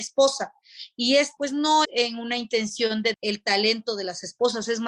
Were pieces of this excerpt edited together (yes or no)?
yes